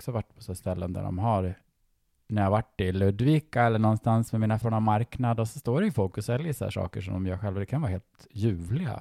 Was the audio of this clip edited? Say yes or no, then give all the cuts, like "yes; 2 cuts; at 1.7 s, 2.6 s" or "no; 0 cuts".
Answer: yes; 1 cut; at 4.6 s